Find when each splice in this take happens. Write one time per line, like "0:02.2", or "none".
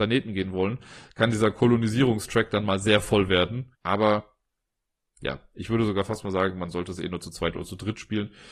0:03.7